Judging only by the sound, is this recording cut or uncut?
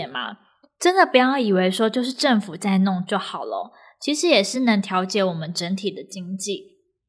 uncut